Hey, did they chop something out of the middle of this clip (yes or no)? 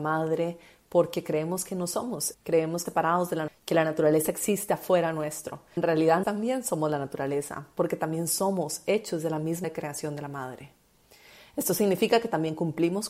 yes